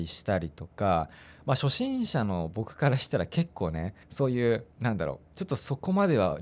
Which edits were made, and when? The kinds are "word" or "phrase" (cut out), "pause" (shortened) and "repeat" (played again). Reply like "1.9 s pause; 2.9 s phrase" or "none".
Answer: 4.0 s pause; 4.7 s pause